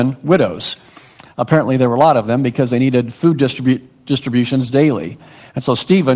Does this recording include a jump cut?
no; 0 cuts

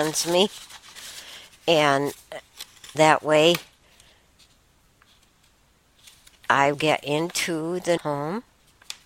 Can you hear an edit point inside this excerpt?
yes; 3 cuts; at 2.9 s, 6.7 s, 8.0 s

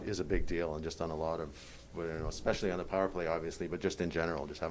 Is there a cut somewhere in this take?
no; 0 cuts

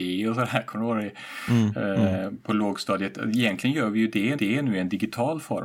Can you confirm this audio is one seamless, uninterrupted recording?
no; 1 cut; at 4.3 s

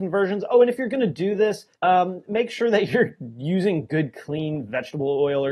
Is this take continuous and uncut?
no; 1 cut; at 1.7 s

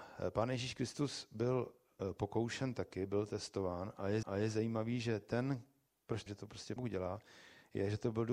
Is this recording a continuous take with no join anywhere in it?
no; 4 cuts; at 4.2 s, 5.9 s, 6.3 s, 6.8 s

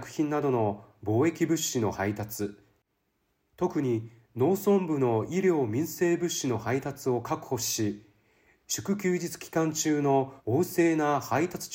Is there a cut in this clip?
yes; 1 cut; at 10.4 s

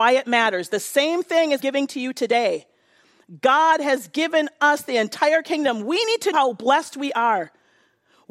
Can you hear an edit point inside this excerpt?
yes; 2 cuts; at 1.6 s, 6.3 s

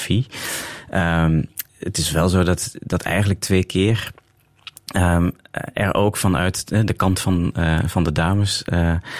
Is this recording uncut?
no; 1 cut; at 1.7 s

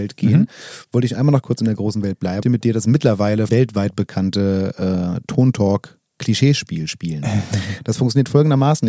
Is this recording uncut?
no; 3 cuts; at 1.4 s, 2.4 s, 3.5 s

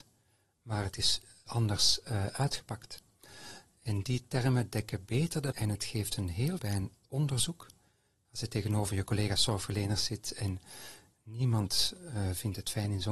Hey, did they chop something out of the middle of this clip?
yes; 3 cuts; at 1.5 s, 5.5 s, 6.6 s

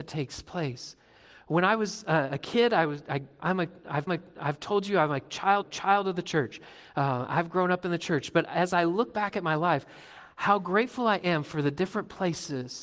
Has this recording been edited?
yes; 2 cuts; at 4.1 s, 5.6 s

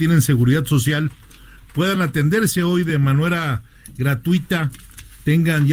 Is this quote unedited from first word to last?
yes; 0 cuts

